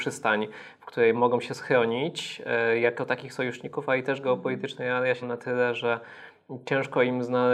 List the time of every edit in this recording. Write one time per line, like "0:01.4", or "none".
0:01.1
0:05.2